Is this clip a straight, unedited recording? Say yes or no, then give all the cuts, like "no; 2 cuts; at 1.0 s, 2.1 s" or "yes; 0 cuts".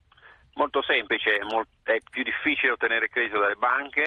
yes; 0 cuts